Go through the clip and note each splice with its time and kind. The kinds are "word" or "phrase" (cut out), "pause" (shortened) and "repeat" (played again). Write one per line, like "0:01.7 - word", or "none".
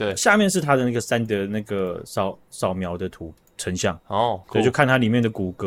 0:01.3 - word
0:04.4 - pause